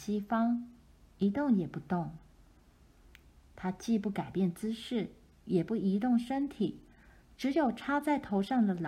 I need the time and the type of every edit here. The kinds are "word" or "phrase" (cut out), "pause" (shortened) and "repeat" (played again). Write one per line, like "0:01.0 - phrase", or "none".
none